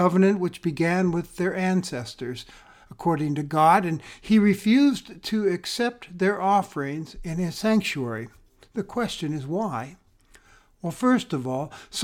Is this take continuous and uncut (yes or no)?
yes